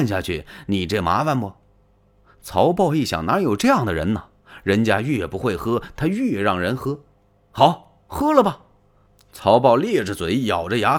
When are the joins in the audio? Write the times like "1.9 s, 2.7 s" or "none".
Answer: none